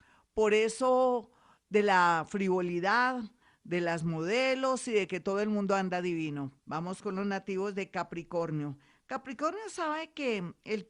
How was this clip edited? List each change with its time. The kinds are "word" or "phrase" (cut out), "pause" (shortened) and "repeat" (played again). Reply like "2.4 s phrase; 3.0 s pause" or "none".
6.6 s pause